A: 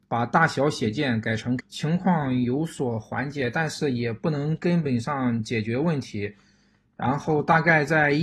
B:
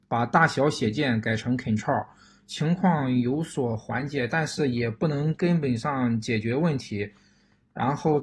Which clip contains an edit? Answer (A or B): A